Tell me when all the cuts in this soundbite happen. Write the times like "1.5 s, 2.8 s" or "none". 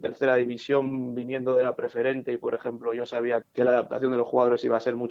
3.4 s